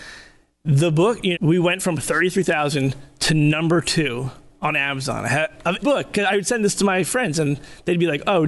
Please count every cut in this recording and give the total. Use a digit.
2